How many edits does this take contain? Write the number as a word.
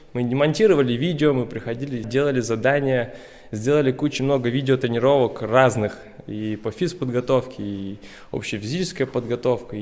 two